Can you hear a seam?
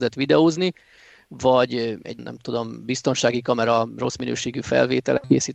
yes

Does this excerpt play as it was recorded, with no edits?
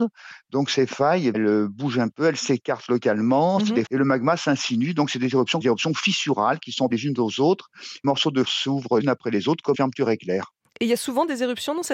no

